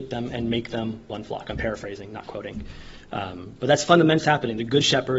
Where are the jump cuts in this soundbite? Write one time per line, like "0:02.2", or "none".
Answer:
0:04.2